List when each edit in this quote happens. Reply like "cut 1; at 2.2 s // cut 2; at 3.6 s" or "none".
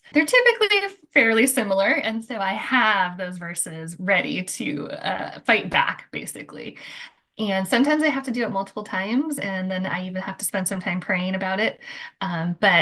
none